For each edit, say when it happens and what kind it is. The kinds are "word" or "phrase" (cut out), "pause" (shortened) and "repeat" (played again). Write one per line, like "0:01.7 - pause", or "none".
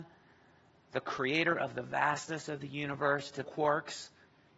0:03.4 - phrase